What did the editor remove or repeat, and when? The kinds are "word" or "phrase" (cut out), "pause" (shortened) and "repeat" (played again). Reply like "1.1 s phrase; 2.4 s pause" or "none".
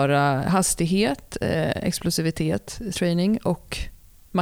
2.9 s word